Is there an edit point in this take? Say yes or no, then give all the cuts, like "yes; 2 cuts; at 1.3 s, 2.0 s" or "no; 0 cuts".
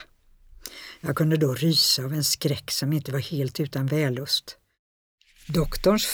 no; 0 cuts